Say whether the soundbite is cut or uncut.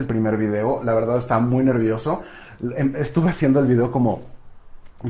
uncut